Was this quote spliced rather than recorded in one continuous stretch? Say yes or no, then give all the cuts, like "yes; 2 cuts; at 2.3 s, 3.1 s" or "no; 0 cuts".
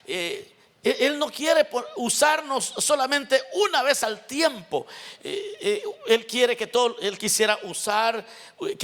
no; 0 cuts